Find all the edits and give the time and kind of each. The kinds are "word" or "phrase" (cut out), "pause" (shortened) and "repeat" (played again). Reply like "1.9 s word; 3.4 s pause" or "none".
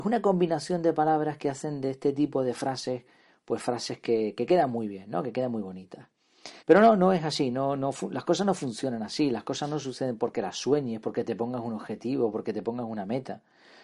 6.6 s pause